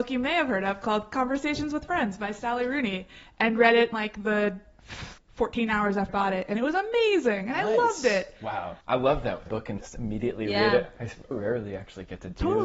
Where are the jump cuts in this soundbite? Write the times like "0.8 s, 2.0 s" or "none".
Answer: 3.9 s, 5.2 s, 6.1 s, 8.8 s, 9.5 s, 9.8 s, 11.3 s